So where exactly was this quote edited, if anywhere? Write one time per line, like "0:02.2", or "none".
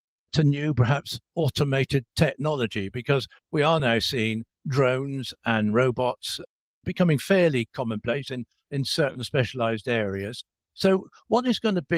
none